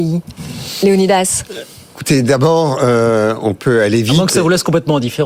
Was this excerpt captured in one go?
yes; 0 cuts

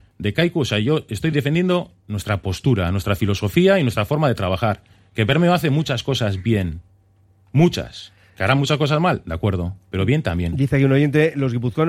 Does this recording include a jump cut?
no; 0 cuts

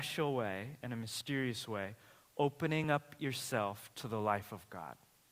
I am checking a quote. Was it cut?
no; 0 cuts

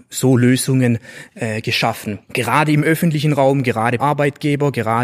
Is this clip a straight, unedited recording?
no; 1 cut; at 4.0 s

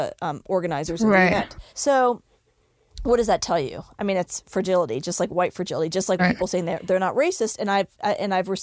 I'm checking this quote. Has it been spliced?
yes; 2 cuts; at 1.7 s, 6.2 s

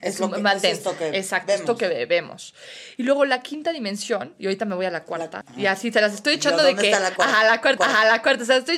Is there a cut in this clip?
yes; 2 cuts; at 5.4 s, 7.8 s

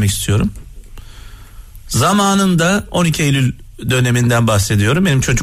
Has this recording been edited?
no; 0 cuts

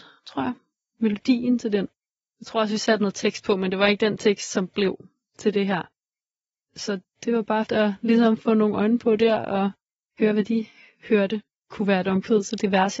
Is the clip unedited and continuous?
no; 1 cut; at 7.7 s

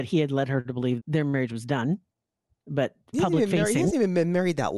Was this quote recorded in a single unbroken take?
no; 2 cuts; at 1.0 s, 3.1 s

